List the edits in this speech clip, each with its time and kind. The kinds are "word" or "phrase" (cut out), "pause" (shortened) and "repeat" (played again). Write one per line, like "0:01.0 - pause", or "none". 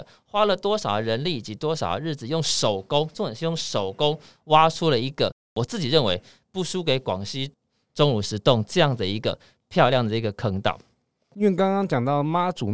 none